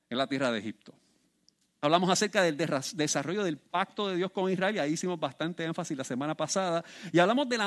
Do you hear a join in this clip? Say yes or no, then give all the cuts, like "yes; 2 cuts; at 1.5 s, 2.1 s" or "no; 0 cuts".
no; 0 cuts